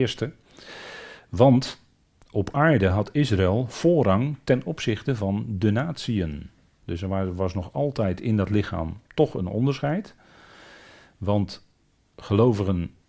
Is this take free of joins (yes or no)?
yes